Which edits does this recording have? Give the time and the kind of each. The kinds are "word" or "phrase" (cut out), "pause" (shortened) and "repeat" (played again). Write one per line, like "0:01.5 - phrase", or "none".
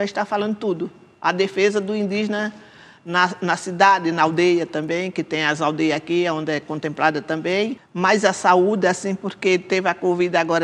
none